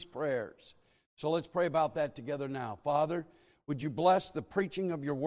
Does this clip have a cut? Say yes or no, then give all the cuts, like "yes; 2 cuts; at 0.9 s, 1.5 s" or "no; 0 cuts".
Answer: no; 0 cuts